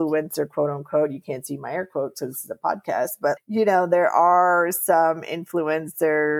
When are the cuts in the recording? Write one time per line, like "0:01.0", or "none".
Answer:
0:03.4